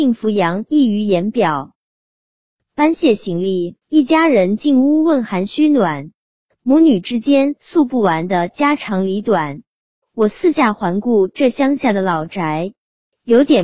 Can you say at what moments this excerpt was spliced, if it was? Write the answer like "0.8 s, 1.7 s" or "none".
3.8 s